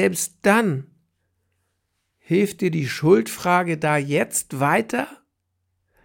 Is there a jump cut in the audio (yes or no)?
no